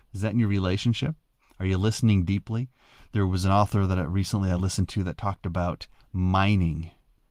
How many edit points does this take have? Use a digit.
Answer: 0